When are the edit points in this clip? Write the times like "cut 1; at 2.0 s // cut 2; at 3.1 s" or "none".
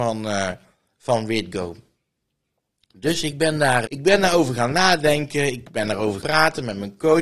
cut 1; at 3.9 s // cut 2; at 6.2 s